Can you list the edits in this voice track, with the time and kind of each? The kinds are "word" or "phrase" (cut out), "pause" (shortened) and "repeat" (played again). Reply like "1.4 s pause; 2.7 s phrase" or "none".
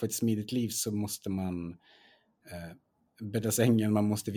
none